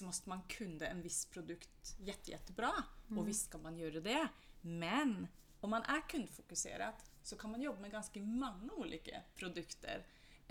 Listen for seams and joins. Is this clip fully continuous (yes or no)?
yes